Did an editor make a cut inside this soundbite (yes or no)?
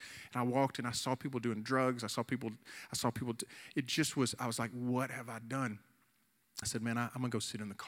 yes